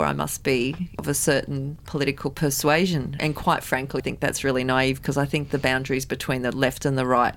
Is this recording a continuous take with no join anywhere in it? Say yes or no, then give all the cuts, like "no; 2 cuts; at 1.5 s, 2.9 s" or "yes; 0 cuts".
no; 1 cut; at 4.0 s